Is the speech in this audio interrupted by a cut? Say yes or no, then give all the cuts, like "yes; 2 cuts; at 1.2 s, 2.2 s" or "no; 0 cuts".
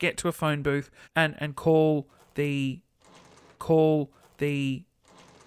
yes; 2 cuts; at 1.0 s, 3.6 s